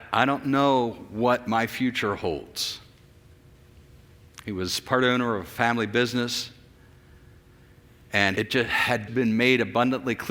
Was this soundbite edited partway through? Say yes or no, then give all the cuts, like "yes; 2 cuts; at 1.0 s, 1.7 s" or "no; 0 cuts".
yes; 2 cuts; at 8.3 s, 9.1 s